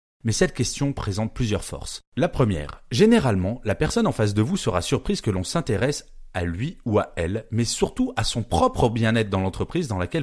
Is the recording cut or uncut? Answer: uncut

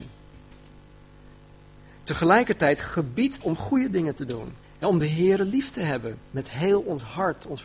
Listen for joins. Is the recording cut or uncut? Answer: cut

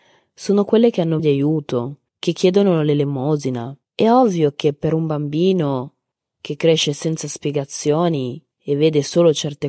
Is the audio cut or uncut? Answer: cut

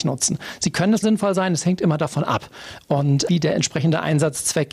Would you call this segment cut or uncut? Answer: cut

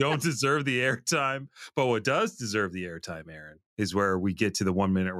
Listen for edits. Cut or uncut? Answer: cut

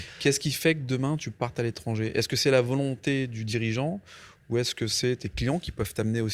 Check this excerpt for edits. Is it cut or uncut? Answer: uncut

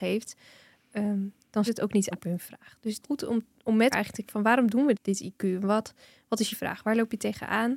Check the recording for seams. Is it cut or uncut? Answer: cut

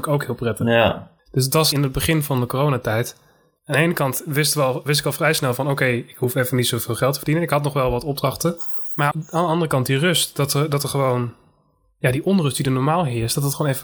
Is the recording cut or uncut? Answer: cut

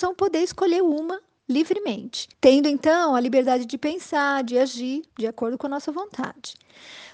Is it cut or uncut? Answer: cut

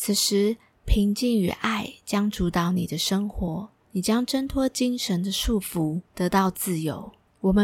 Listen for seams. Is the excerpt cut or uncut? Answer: cut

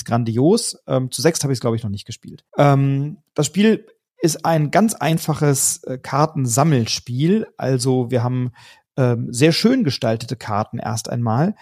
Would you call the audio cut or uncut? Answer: cut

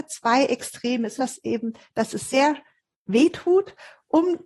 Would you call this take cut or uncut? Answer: cut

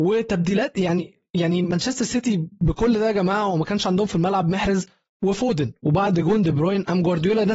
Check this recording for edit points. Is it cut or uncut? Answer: uncut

